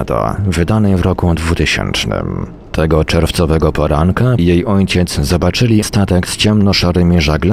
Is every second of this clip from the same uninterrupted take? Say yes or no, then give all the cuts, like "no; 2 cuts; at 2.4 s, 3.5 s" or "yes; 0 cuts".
no; 2 cuts; at 4.4 s, 5.8 s